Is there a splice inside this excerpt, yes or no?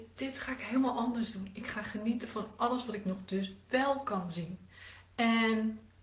no